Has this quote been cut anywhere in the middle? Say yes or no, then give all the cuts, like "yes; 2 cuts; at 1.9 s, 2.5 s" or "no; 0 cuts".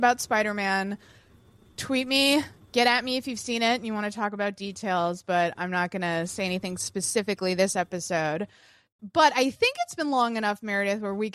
no; 0 cuts